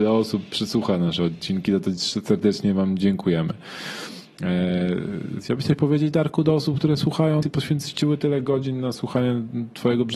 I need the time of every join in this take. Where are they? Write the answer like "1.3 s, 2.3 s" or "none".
7.4 s